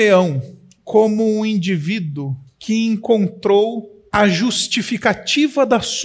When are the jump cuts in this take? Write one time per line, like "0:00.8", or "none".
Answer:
0:04.1